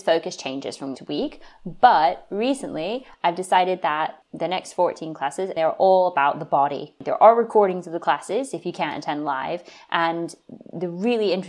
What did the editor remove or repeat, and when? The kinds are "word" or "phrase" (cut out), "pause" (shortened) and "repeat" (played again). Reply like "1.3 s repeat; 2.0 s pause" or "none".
0.9 s word